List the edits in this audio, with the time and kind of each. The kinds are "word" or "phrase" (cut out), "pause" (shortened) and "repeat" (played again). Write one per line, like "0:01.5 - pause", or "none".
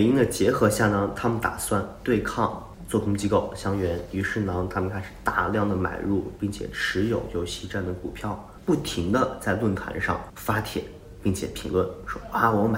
none